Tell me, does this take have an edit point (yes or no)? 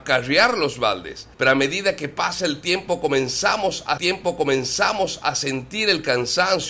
yes